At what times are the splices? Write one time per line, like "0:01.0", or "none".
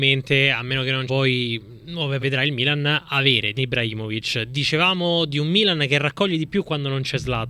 0:01.1
0:02.2
0:03.6